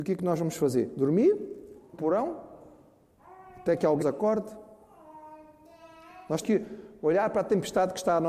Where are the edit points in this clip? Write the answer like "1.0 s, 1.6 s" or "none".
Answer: 1.9 s, 4.0 s, 6.4 s